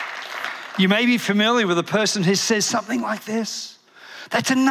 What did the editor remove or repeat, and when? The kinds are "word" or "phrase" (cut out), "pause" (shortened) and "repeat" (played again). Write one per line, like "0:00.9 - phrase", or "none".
none